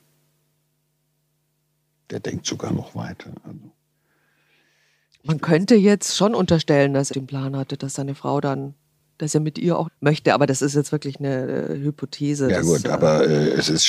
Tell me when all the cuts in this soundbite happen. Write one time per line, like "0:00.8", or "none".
0:07.1
0:09.8

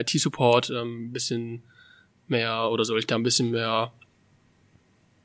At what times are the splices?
none

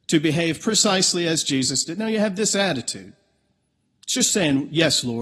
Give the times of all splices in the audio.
none

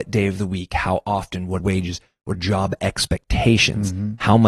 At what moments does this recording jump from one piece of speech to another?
0:01.6
0:02.3

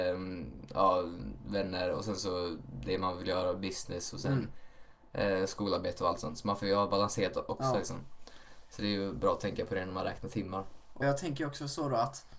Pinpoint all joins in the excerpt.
0:11.0

